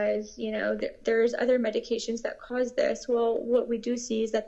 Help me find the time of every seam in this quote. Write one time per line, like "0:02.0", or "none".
none

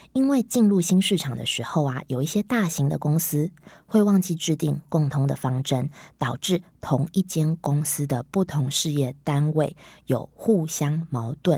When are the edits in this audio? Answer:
none

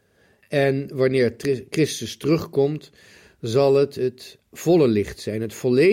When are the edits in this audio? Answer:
none

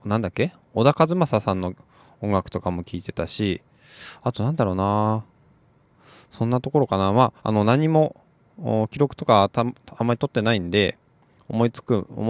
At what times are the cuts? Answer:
0:07.4

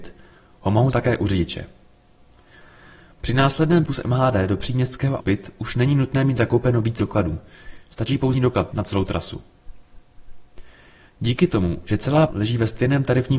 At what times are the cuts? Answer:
0:00.9
0:03.9
0:05.2
0:07.0
0:08.3
0:08.7
0:12.3

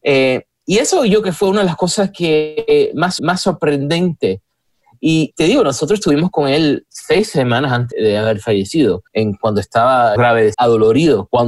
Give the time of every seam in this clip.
0:01.2
0:03.2
0:07.9
0:09.1
0:10.2
0:10.5

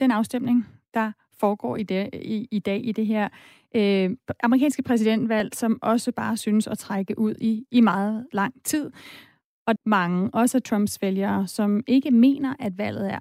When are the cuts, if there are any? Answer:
0:09.8

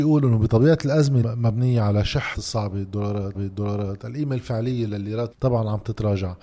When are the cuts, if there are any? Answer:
0:01.2
0:02.3
0:03.3
0:04.9
0:05.3

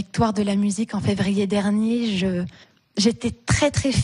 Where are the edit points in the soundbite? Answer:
0:02.6

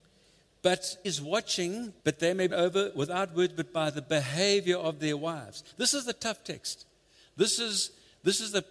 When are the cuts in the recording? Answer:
0:01.0
0:02.0
0:02.5

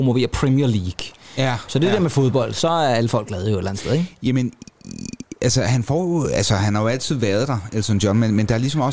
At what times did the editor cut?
none

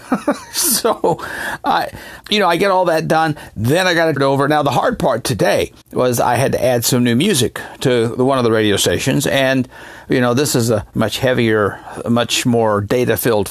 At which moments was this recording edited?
0:02.2
0:04.2
0:05.8
0:10.9

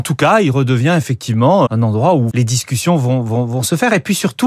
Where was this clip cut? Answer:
0:01.7
0:02.3

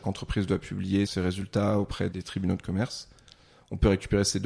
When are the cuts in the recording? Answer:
0:01.1
0:02.1

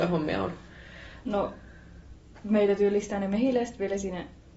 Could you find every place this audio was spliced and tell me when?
none

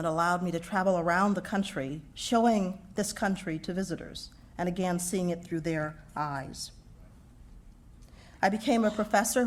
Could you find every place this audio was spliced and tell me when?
none

